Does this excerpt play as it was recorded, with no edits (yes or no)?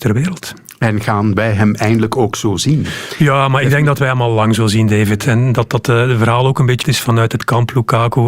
no